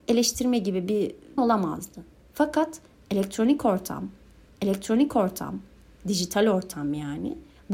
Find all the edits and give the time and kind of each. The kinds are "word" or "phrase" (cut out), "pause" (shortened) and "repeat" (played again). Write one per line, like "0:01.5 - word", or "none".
0:01.4 - word
0:04.5 - repeat